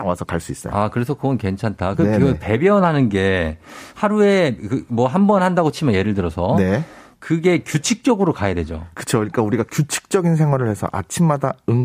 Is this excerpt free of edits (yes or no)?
yes